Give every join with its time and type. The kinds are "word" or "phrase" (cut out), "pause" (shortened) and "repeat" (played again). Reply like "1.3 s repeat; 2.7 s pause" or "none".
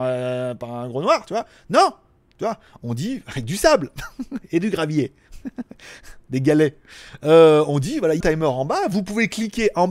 8.2 s phrase